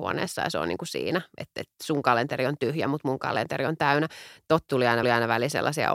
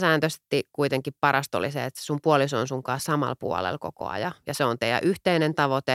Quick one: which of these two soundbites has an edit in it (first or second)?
first